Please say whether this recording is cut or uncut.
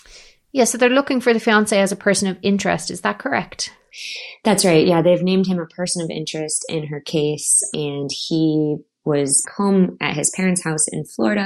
cut